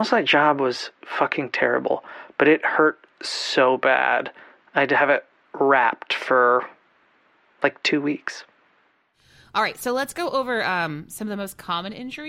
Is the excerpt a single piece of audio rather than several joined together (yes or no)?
yes